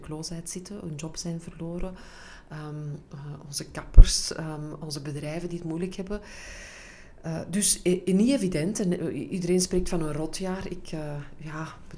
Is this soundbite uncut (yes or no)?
yes